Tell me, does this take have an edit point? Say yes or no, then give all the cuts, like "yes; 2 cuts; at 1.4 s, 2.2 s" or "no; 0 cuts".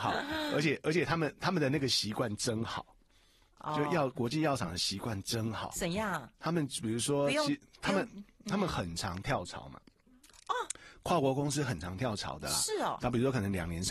no; 0 cuts